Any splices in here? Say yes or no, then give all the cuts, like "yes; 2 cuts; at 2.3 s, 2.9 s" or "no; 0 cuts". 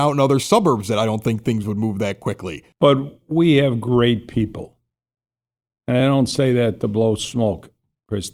no; 0 cuts